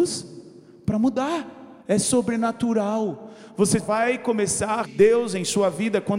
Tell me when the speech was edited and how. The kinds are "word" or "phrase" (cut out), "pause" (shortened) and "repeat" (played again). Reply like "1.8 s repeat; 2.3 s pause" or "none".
1.8 s pause; 3.8 s word; 4.8 s word

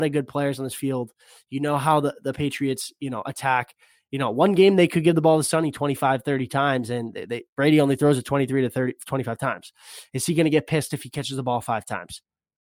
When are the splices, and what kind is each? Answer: none

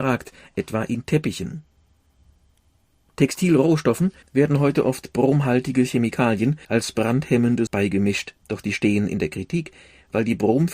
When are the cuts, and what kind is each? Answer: 4.2 s pause; 6.6 s pause; 7.7 s word; 8.4 s pause

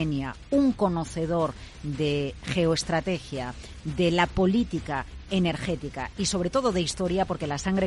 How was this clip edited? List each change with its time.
none

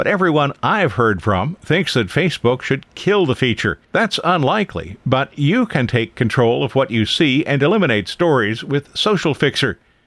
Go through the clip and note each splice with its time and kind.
3.8 s pause

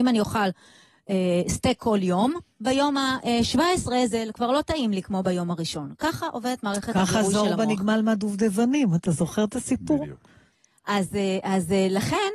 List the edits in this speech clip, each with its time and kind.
none

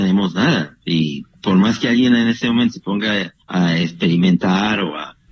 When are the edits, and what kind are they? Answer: 1.4 s pause; 3.4 s pause

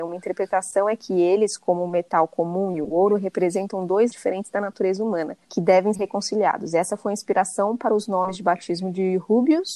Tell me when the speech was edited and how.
4.1 s word; 5.4 s pause; 5.9 s word

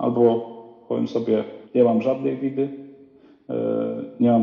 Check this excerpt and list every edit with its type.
1.6 s pause

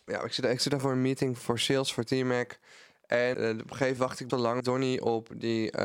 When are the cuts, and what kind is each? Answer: 1.4 s word; 3.3 s word; 4.0 s word; 4.3 s word; 4.6 s word

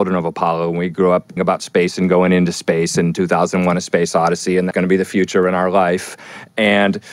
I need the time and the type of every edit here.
1.4 s word; 4.7 s phrase

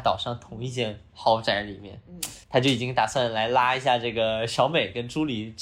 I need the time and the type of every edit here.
2.4 s pause

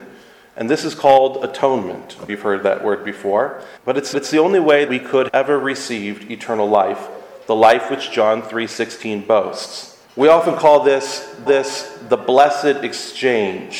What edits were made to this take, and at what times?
2.3 s word; 3.8 s pause; 4.1 s repeat; 4.9 s word; 5.3 s word; 10.0 s pause; 11.5 s repeat

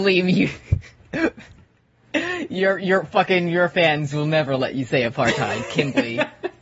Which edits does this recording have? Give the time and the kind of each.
none

